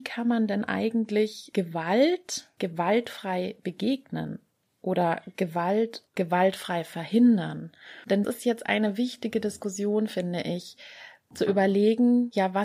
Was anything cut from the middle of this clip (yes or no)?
yes